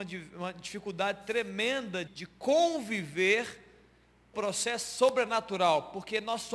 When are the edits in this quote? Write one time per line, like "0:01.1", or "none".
0:02.1
0:04.3